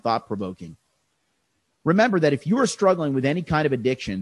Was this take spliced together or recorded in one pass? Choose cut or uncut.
uncut